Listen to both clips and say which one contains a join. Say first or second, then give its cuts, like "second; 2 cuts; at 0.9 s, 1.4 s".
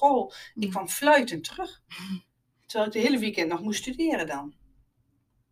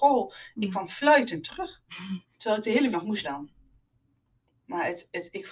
second; 3 cuts; at 2.2 s, 2.9 s, 3.2 s